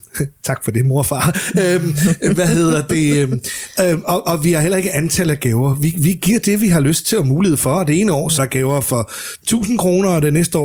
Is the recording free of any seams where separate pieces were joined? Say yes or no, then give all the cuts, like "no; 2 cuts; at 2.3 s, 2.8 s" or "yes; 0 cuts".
no; 1 cut; at 8.4 s